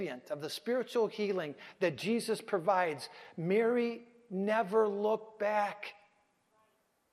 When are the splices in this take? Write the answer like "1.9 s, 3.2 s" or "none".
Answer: none